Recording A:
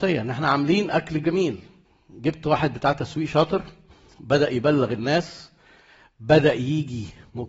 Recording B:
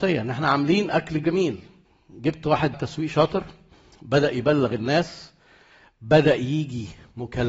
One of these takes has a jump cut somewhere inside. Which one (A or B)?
B